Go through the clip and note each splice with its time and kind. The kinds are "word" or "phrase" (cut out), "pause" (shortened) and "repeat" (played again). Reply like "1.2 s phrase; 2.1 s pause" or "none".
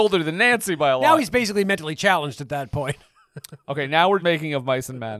4.2 s word